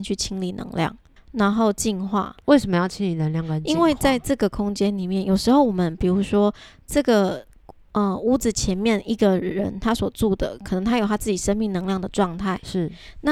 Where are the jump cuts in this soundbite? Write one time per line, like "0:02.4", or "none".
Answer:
0:01.2